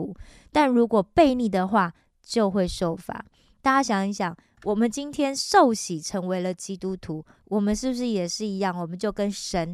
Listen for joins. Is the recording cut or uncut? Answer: uncut